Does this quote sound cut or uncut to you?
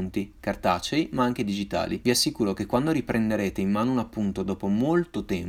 uncut